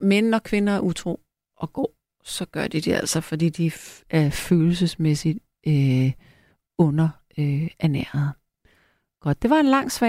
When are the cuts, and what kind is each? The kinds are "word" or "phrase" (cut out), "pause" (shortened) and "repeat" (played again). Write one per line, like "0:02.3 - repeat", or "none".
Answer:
none